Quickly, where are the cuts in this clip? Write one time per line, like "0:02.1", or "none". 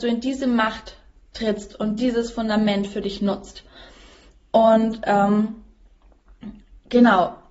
none